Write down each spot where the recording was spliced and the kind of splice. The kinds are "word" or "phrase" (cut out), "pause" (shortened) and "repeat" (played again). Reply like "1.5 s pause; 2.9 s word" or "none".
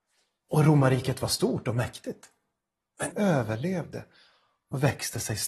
3.1 s word